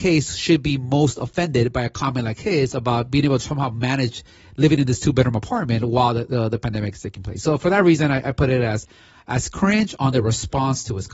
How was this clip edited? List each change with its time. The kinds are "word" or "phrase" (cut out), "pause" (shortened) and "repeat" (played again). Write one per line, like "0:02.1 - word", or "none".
none